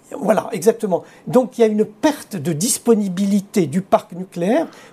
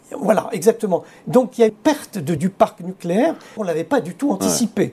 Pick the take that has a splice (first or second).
second